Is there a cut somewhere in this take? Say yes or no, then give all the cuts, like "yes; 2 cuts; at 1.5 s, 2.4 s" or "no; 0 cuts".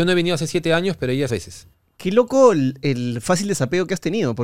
yes; 2 cuts; at 1.3 s, 1.7 s